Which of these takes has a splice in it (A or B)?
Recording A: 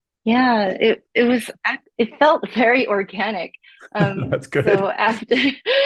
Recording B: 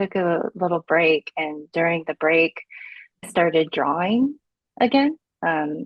B